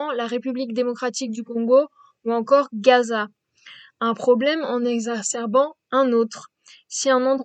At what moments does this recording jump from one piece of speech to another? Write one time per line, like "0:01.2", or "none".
none